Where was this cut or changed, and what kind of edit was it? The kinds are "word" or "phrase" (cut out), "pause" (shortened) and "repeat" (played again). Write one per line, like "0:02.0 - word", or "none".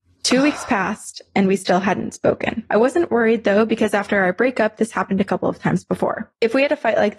none

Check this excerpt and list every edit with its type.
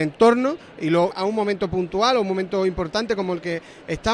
0:01.1 - phrase

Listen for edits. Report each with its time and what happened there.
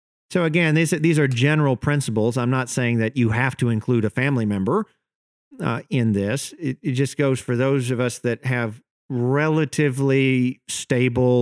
none

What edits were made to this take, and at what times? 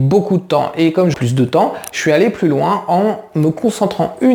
0:01.1 - phrase

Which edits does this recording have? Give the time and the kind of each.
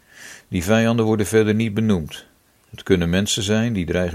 none

